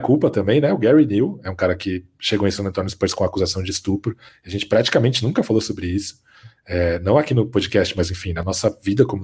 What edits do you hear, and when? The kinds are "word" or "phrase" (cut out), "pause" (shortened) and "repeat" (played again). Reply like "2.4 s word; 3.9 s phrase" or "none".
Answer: none

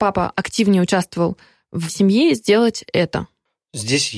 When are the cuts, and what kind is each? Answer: 1.9 s word

